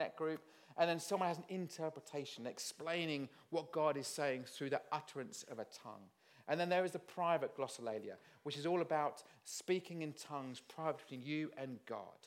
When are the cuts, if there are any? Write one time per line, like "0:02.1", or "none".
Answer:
none